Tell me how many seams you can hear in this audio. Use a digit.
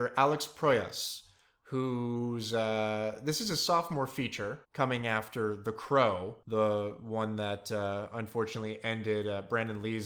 2